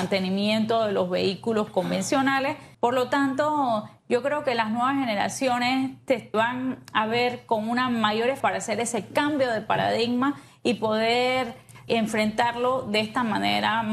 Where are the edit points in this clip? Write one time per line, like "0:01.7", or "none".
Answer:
0:02.7
0:06.3
0:08.4
0:11.9